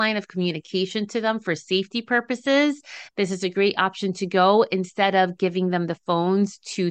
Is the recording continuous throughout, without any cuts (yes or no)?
yes